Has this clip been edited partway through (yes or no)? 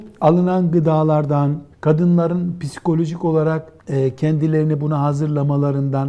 yes